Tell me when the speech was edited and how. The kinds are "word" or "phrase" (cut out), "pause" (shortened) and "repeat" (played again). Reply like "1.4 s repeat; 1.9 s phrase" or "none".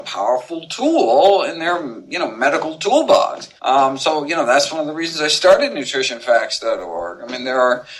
3.6 s pause